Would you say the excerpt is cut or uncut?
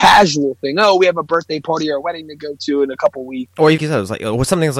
cut